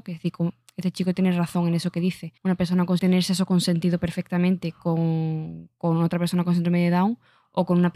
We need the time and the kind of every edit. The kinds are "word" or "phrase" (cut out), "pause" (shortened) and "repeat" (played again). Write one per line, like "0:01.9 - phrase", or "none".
0:02.4 - pause
0:03.0 - phrase